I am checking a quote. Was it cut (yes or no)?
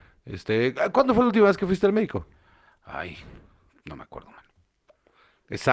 no